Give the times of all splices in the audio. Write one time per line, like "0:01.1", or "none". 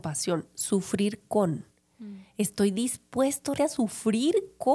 0:03.5